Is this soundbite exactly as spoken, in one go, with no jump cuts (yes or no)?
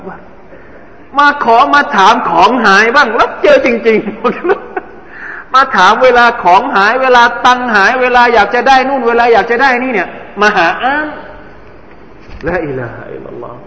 yes